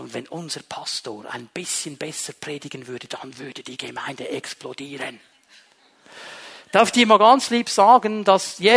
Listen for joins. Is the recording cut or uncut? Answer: uncut